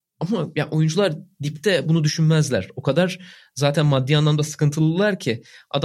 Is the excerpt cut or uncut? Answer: uncut